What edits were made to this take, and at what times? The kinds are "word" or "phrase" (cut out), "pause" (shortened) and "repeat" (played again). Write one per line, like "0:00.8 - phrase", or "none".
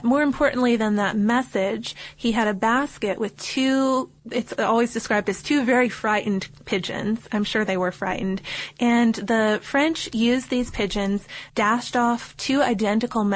0:04.2 - pause
0:11.5 - pause